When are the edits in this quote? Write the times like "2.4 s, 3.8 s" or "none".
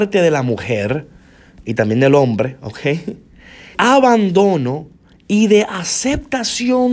3.7 s